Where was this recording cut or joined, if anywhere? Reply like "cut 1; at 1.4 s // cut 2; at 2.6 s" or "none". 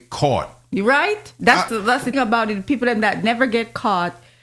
cut 1; at 1.7 s // cut 2; at 2.1 s